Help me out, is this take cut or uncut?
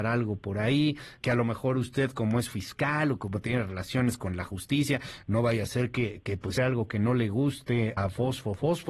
cut